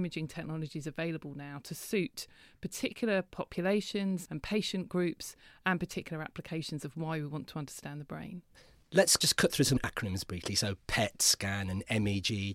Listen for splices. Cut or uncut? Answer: uncut